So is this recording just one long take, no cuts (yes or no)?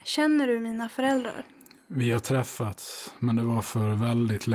yes